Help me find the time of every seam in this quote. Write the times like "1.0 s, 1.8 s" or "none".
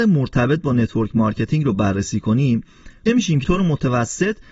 3.1 s, 3.4 s